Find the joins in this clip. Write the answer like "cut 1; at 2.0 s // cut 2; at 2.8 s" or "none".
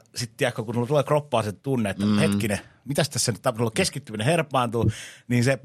cut 1; at 1.6 s